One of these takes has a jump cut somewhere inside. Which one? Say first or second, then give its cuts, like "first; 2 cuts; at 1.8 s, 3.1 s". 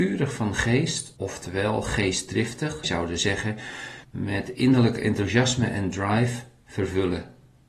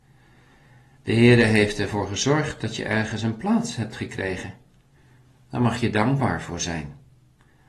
first; 3 cuts; at 1.2 s, 2.8 s, 4.0 s